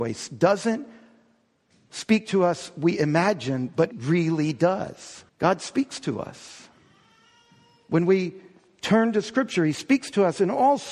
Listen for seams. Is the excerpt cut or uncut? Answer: cut